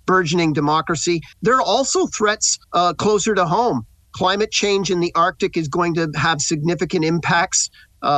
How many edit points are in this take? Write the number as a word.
two